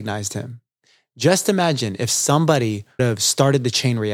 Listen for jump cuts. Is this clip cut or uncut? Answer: cut